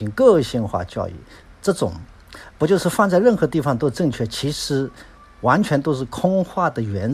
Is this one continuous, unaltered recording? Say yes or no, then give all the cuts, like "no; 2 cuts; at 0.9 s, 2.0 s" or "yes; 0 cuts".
yes; 0 cuts